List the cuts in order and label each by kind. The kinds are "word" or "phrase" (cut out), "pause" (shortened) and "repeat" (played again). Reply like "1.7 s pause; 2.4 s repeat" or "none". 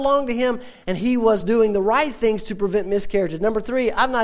none